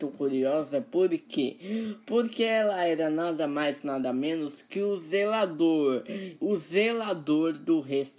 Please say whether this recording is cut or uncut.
uncut